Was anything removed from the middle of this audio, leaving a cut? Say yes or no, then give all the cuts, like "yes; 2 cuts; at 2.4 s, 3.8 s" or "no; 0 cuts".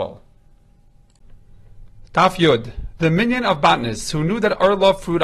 no; 0 cuts